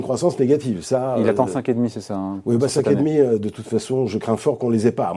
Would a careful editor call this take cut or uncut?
uncut